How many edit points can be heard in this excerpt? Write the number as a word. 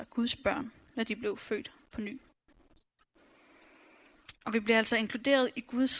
one